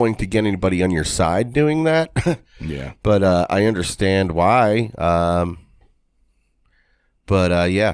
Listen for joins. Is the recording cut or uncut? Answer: uncut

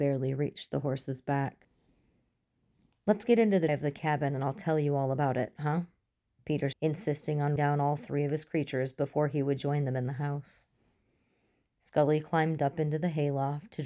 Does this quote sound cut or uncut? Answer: cut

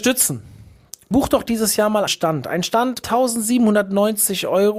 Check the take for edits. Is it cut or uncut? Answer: cut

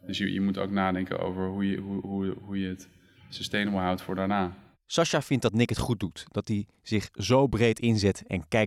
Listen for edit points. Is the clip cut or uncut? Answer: uncut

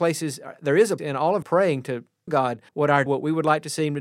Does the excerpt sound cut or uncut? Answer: cut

